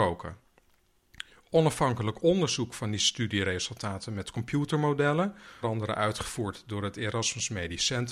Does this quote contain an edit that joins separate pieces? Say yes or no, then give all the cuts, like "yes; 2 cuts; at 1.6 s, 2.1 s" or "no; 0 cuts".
yes; 1 cut; at 5.6 s